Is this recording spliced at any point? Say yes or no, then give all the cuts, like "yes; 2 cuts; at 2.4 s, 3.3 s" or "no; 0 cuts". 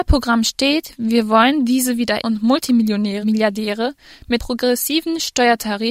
yes; 3 cuts; at 2.2 s, 3.2 s, 4.4 s